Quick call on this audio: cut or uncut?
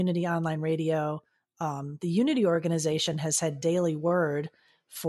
uncut